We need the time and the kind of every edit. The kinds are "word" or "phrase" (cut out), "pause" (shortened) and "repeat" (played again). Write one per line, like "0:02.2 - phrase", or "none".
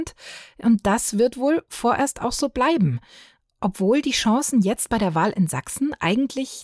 none